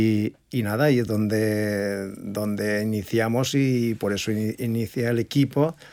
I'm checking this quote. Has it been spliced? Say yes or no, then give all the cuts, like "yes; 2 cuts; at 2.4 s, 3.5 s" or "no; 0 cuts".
no; 0 cuts